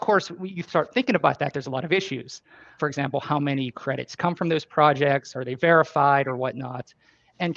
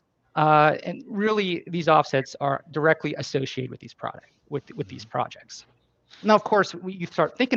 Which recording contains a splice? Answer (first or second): first